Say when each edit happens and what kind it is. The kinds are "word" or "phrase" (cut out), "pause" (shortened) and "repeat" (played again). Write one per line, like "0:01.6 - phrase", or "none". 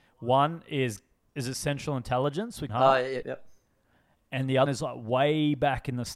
0:01.3 - word
0:02.7 - word
0:03.2 - word
0:04.7 - word